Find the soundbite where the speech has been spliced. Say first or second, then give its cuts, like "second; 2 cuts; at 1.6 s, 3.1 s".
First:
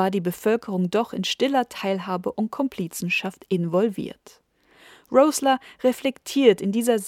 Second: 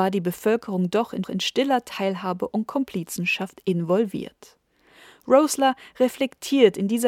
second; 1 cut; at 1.2 s